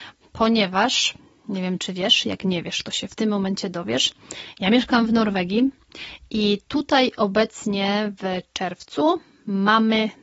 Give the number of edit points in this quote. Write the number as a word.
zero